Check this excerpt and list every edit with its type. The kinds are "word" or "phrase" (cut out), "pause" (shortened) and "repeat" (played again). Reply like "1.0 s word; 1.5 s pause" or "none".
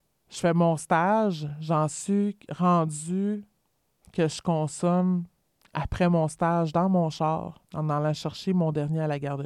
7.6 s pause